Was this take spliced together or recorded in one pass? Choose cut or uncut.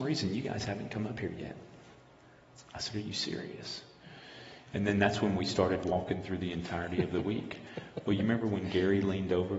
uncut